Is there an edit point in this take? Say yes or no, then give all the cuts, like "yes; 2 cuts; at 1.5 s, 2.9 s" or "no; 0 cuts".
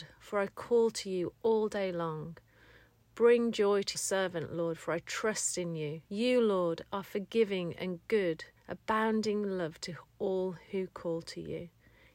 yes; 3 cuts; at 3.9 s, 6.0 s, 8.6 s